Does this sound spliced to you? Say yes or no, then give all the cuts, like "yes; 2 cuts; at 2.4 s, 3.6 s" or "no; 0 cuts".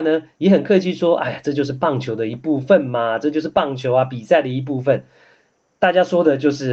no; 0 cuts